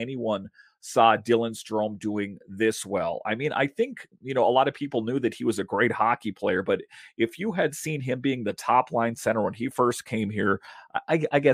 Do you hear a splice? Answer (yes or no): no